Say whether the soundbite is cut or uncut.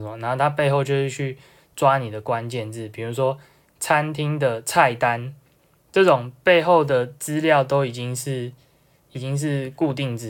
uncut